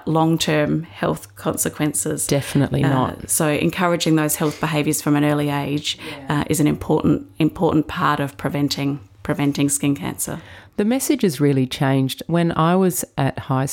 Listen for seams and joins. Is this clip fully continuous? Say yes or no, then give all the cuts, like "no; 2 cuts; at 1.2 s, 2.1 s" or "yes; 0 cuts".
yes; 0 cuts